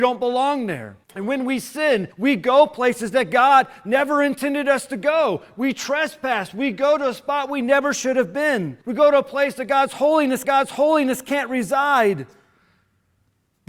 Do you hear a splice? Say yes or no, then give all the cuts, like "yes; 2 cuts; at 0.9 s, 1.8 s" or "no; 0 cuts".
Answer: yes; 4 cuts; at 1.0 s, 2.1 s, 8.8 s, 10.4 s